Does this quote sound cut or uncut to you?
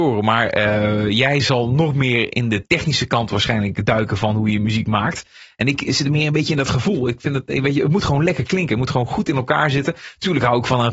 uncut